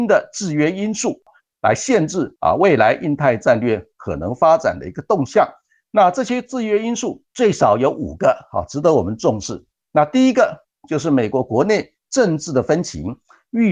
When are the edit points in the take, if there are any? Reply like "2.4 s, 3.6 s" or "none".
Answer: none